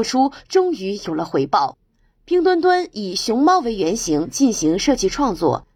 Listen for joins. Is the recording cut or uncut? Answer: uncut